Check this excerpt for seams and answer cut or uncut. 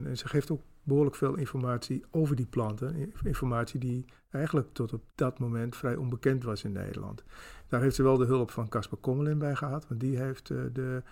cut